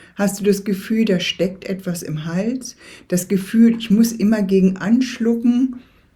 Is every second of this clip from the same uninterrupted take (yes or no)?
yes